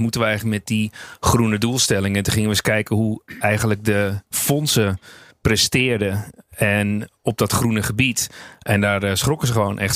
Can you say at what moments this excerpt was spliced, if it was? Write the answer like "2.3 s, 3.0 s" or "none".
none